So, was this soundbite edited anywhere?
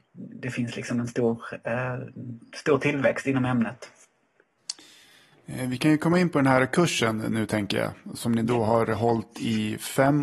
no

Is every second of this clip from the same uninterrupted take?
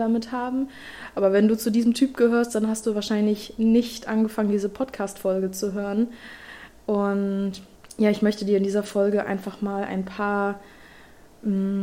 yes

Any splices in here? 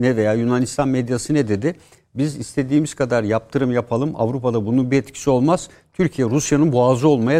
no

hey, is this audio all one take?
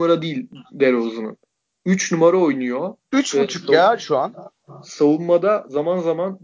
yes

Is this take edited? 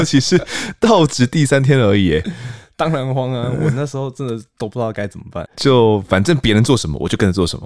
yes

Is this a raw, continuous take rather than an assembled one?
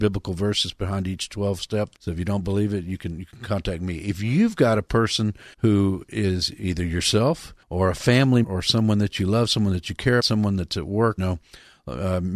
no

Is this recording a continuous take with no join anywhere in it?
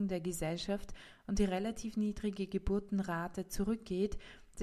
yes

